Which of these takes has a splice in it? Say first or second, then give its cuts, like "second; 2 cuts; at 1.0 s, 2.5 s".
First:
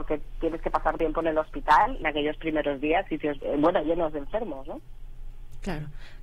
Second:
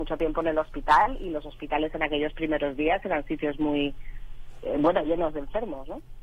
first; 4 cuts; at 1.0 s, 2.0 s, 3.1 s, 3.4 s